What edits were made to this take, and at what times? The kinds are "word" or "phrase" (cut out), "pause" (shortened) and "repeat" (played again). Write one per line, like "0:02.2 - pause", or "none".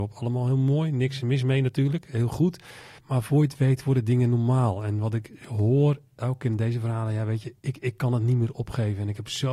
0:03.0 - pause
0:07.6 - pause